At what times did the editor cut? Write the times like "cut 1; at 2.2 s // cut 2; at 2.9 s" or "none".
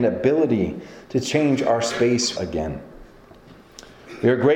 cut 1; at 2.3 s

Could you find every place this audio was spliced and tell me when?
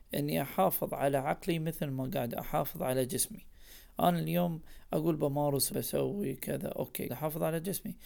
cut 1; at 5.7 s // cut 2; at 7.1 s

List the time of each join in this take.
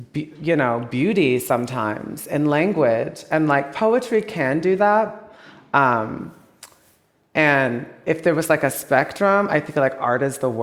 none

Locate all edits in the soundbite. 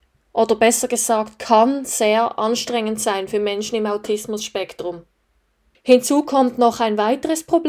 none

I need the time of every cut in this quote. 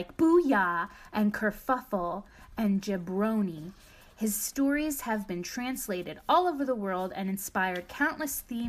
none

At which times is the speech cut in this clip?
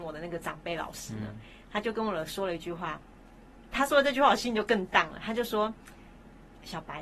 none

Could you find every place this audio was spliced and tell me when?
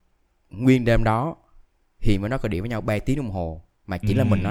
none

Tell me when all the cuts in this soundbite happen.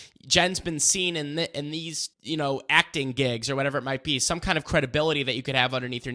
cut 1; at 2.1 s

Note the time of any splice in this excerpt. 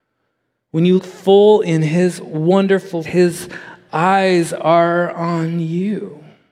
cut 1; at 1.0 s // cut 2; at 3.0 s

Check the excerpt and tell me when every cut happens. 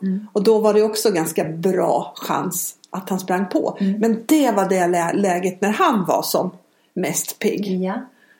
none

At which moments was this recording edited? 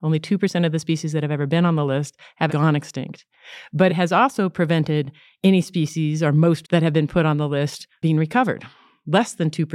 cut 1; at 2.5 s // cut 2; at 3.9 s // cut 3; at 6.6 s // cut 4; at 8.0 s

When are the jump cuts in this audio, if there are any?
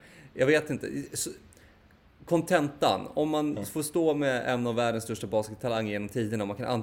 none

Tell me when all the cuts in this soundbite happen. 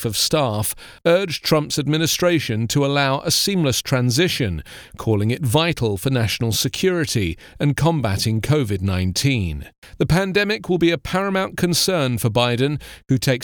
none

